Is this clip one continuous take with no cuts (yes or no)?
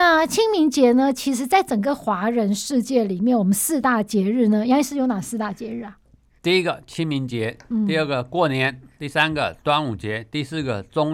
yes